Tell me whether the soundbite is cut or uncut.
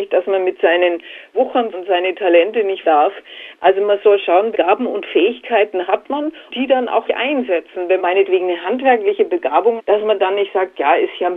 cut